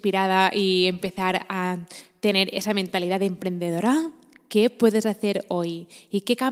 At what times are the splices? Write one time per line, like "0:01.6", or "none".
none